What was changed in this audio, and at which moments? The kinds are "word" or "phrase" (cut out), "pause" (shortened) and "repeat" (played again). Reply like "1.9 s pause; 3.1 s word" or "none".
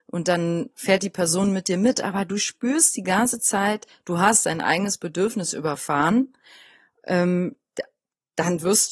none